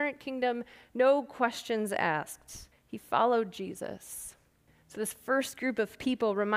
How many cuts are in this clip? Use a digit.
2